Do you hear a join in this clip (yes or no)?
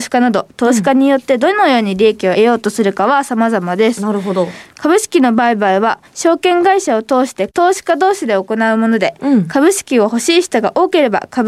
yes